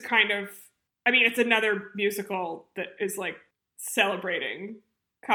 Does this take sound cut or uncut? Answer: uncut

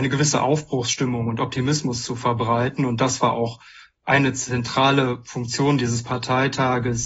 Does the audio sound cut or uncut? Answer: uncut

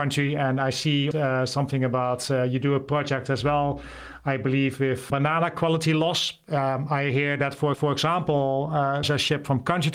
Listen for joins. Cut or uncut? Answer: cut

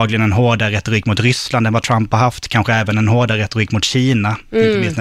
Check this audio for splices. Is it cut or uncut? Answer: uncut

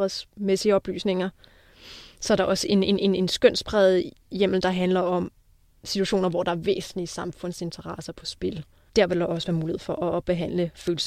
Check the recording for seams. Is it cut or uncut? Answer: uncut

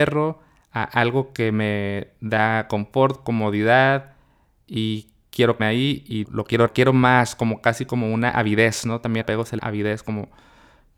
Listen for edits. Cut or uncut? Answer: cut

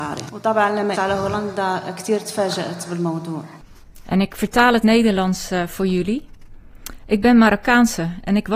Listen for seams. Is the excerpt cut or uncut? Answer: cut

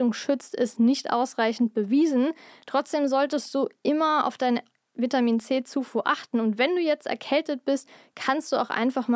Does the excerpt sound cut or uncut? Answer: uncut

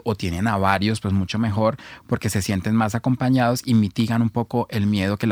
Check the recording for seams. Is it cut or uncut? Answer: uncut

